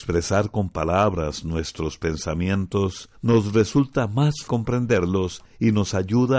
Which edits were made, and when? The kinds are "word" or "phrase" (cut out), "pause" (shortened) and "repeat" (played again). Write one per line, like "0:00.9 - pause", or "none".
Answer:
0:04.5 - word